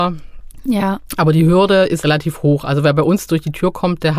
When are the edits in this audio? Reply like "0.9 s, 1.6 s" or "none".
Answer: 2.0 s